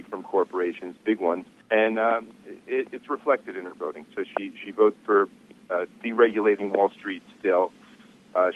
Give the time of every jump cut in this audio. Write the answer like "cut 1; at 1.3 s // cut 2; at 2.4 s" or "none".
cut 1; at 1.6 s